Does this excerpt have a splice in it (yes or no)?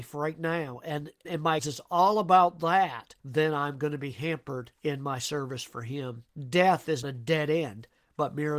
yes